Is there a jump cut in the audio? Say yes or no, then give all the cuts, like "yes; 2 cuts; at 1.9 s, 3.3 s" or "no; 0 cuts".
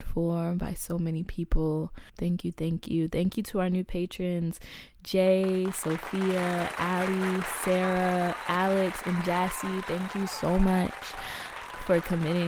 yes; 1 cut; at 2.1 s